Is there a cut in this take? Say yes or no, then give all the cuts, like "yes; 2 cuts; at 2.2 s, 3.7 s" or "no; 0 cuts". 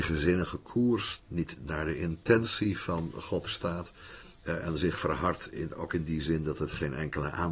yes; 2 cuts; at 1.2 s, 3.5 s